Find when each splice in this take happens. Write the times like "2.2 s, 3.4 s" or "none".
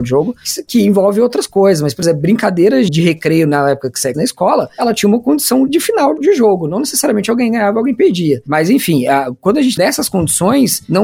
2.9 s, 4.1 s, 9.8 s